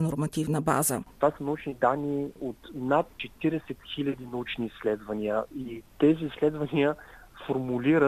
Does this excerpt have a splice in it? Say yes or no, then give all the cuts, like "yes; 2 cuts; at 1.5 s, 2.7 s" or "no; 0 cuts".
no; 0 cuts